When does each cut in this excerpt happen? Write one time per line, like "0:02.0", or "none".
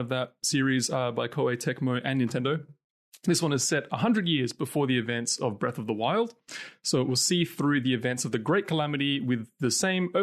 none

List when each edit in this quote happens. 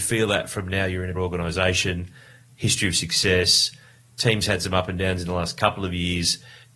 0:01.1

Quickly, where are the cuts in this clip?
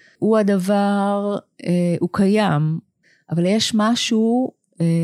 none

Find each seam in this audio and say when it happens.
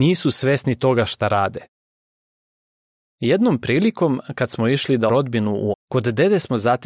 0:05.1
0:05.7

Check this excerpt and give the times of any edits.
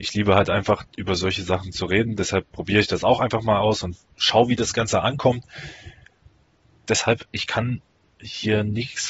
none

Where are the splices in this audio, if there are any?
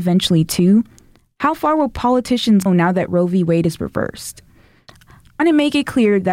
0:02.7
0:05.4

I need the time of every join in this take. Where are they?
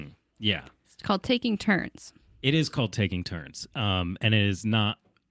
none

